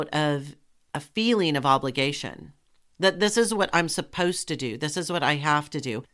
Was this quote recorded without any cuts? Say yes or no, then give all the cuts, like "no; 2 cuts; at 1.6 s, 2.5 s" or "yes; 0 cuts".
yes; 0 cuts